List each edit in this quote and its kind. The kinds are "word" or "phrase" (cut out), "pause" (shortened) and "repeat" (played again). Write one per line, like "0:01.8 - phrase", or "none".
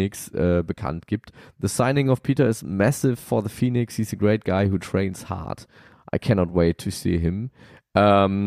none